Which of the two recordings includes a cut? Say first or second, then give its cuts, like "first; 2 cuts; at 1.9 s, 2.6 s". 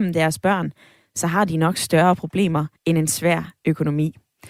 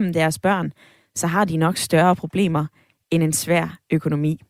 first; 1 cut; at 2.8 s